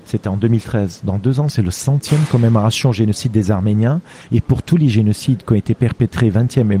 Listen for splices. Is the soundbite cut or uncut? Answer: uncut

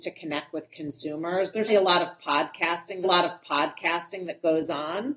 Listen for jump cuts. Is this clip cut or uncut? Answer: cut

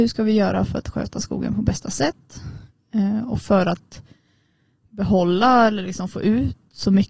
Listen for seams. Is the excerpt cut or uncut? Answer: uncut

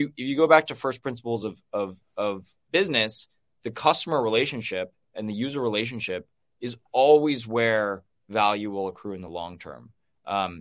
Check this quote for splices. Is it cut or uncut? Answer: uncut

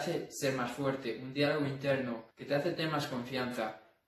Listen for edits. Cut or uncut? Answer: cut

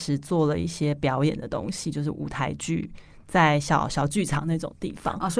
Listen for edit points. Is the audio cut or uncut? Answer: uncut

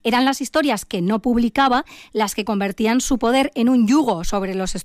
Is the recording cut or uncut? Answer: uncut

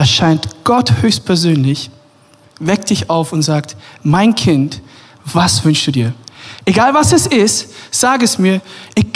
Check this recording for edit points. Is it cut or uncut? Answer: uncut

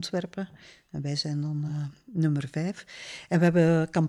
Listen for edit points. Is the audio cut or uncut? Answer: uncut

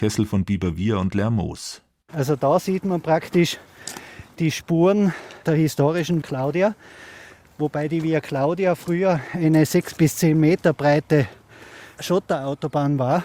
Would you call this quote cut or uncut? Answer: cut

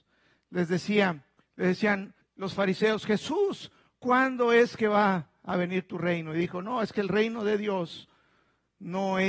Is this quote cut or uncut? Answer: cut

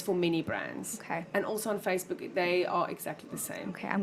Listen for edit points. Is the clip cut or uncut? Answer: uncut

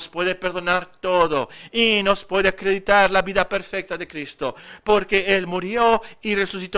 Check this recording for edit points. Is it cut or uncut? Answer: uncut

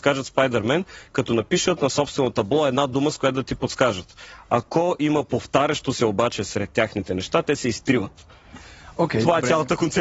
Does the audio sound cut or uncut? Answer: uncut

